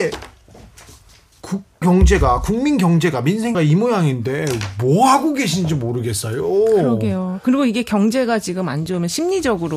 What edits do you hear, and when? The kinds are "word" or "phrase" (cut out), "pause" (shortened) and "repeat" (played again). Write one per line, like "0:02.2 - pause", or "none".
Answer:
0:01.8 - word
0:03.5 - word